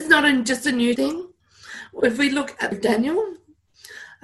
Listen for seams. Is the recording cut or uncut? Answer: cut